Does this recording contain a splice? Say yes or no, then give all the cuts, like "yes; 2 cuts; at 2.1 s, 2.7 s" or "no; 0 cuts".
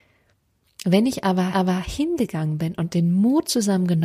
yes; 1 cut; at 1.5 s